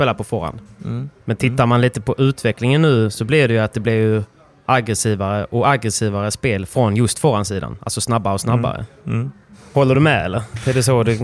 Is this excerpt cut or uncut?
uncut